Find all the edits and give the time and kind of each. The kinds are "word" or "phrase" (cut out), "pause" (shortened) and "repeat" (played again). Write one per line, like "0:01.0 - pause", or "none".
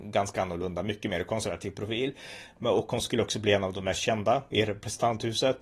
none